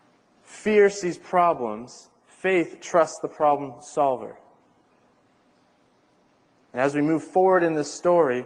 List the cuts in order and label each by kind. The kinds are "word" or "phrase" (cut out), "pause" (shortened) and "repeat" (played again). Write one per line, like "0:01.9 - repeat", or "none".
none